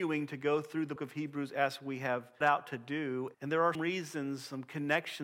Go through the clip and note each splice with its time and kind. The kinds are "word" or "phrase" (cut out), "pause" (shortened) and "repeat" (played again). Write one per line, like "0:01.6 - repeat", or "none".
0:01.0 - word
0:02.4 - word
0:03.3 - word
0:03.7 - word